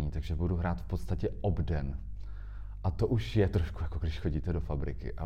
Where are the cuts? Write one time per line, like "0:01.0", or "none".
none